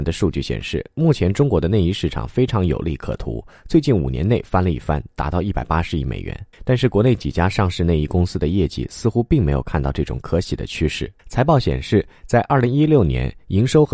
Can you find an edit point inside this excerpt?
yes; 2 cuts; at 6.5 s, 11.2 s

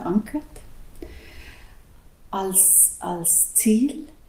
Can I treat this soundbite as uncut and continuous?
yes; 0 cuts

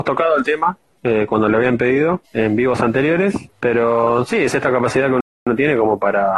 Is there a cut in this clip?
yes; 3 cuts; at 0.9 s, 2.2 s, 3.5 s

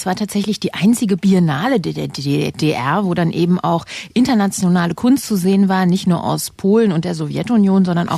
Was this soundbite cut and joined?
no; 0 cuts

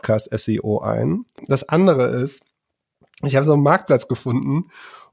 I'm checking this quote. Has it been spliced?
no; 0 cuts

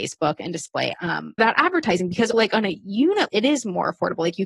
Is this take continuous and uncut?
no; 4 cuts; at 0.9 s, 1.4 s, 2.3 s, 3.3 s

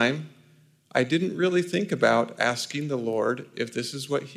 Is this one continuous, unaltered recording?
yes; 0 cuts

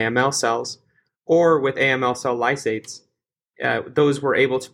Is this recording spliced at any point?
no; 0 cuts

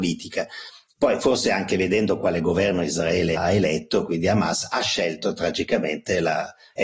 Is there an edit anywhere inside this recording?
yes; 1 cut; at 3.3 s

